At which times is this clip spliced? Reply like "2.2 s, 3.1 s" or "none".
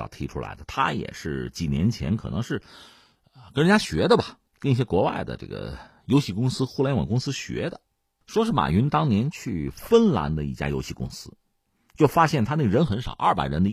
4.5 s